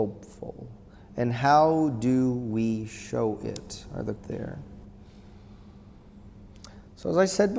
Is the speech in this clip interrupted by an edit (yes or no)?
yes